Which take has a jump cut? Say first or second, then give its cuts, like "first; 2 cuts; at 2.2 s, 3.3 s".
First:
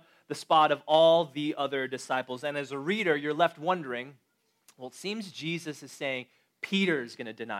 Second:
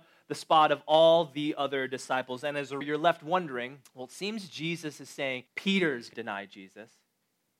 second; 4 cuts; at 2.8 s, 3.8 s, 5.5 s, 6.1 s